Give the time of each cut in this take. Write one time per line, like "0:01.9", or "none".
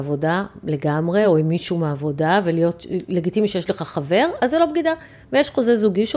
none